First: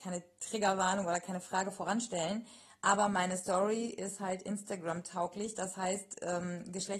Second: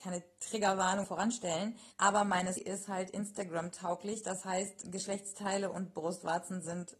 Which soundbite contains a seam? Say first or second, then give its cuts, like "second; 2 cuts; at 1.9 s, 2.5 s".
second; 4 cuts; at 1.0 s, 1.9 s, 2.6 s, 4.8 s